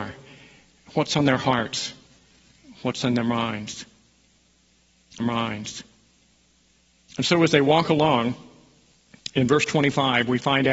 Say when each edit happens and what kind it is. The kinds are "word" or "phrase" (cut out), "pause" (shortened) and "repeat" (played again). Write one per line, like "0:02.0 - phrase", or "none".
0:05.2 - repeat

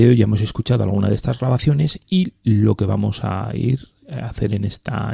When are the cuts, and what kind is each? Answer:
none

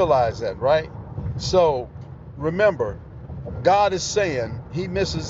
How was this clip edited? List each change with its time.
none

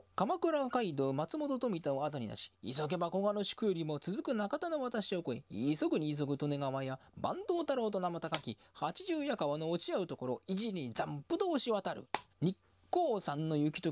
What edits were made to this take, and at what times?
0:12.3 - pause

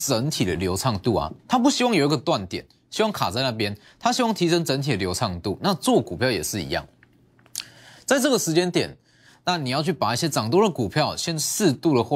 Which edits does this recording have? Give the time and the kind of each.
0:01.4 - pause

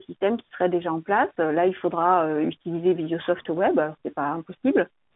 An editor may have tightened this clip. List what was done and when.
none

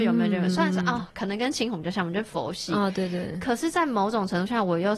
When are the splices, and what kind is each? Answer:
none

